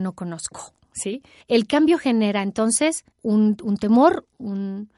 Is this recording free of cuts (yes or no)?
no